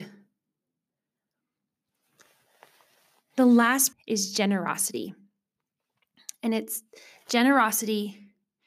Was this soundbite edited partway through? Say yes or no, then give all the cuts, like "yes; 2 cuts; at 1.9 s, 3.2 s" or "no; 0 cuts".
yes; 1 cut; at 3.9 s